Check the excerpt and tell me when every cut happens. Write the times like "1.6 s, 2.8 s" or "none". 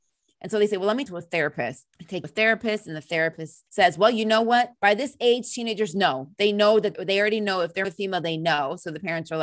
1.1 s, 1.9 s, 2.2 s, 3.7 s, 4.8 s, 6.9 s, 7.8 s